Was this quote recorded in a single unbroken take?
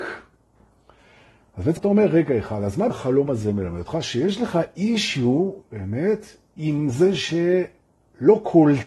no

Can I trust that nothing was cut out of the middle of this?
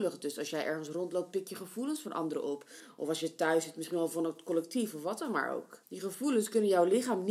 no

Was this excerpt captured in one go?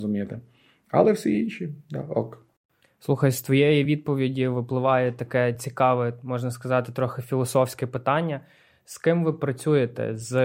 yes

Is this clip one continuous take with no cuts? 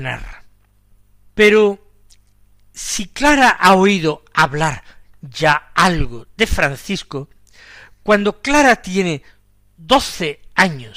yes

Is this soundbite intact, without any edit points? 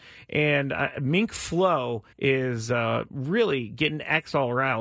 no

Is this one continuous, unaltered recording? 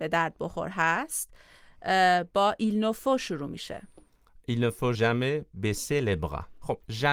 no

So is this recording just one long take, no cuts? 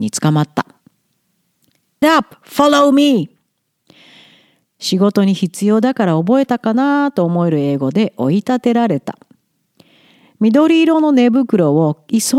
no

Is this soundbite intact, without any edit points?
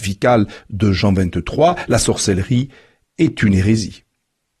yes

